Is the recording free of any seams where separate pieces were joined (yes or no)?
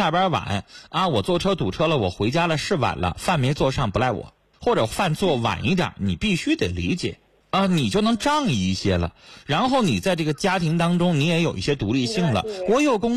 no